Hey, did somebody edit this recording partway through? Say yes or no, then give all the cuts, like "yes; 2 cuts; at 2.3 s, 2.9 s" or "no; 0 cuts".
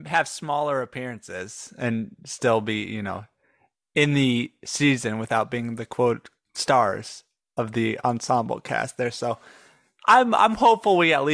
no; 0 cuts